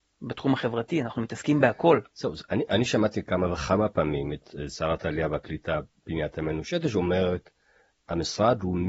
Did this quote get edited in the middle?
no; 0 cuts

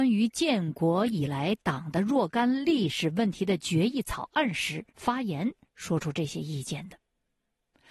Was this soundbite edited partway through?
yes; 1 cut; at 4.9 s

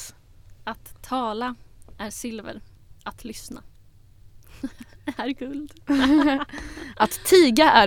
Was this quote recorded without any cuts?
no; 1 cut; at 3.0 s

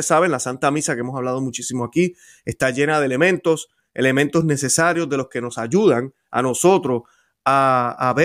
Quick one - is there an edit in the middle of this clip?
no; 0 cuts

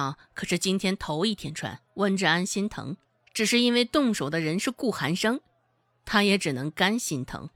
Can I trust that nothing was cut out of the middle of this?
no; 2 cuts; at 1.9 s, 3.0 s

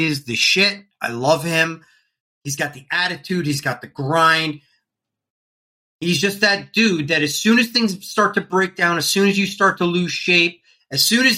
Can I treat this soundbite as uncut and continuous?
yes; 0 cuts

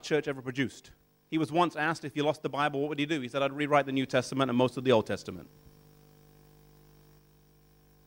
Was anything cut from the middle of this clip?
no; 0 cuts

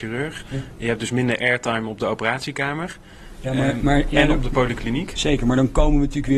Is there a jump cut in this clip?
no; 0 cuts

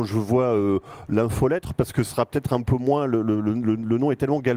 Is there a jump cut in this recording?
no; 0 cuts

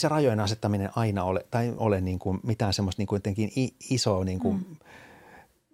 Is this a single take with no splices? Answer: no; 1 cut; at 1.8 s

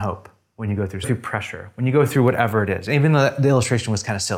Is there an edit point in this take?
yes; 1 cut; at 1.0 s

